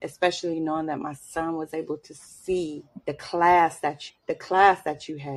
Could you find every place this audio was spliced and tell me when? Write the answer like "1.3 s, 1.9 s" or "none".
3.0 s, 4.1 s